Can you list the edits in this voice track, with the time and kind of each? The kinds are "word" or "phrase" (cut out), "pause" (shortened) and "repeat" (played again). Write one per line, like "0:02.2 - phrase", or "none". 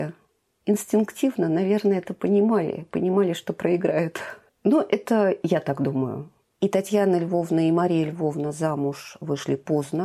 none